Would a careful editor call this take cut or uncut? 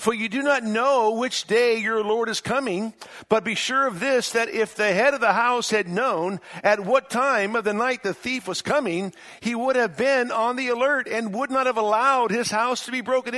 uncut